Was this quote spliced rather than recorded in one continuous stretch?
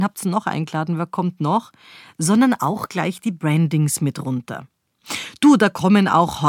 no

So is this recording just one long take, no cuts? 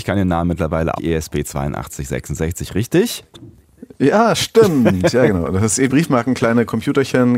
no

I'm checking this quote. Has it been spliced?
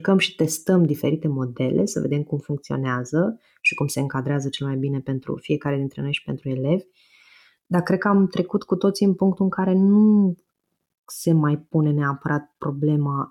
no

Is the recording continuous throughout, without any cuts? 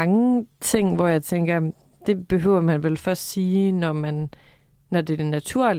yes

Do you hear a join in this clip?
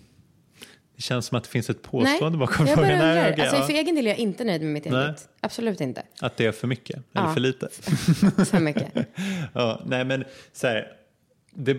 no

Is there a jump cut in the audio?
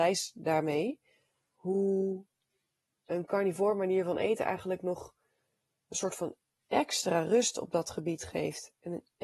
no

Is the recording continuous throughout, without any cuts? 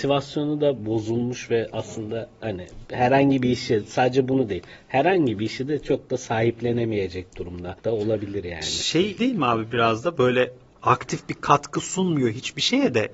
no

